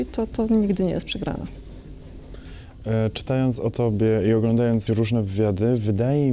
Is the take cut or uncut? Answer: cut